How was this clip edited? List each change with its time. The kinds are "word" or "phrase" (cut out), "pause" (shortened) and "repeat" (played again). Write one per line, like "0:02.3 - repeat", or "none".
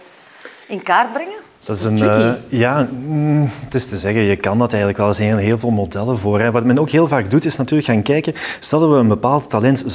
none